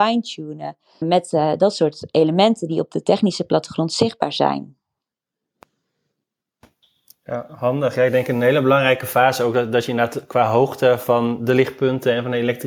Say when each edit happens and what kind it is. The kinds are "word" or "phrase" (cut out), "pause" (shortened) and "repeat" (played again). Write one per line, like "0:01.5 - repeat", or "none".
0:01.0 - word